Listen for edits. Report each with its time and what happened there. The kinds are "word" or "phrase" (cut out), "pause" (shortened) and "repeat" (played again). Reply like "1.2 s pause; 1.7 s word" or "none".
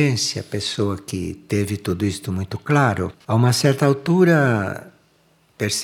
3.2 s pause